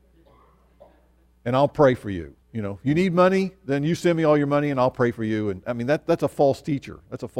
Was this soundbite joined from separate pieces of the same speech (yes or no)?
yes